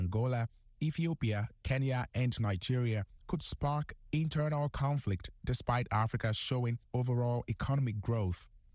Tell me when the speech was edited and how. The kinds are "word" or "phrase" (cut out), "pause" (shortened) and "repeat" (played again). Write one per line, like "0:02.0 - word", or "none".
none